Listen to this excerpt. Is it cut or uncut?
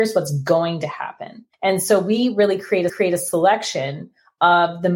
cut